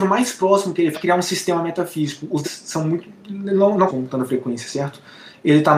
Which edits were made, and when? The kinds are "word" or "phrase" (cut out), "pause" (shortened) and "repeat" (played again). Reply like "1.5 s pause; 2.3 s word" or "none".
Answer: 0.9 s word; 2.4 s word; 3.9 s phrase